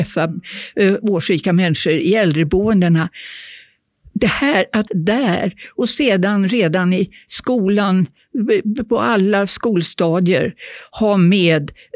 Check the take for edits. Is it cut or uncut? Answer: cut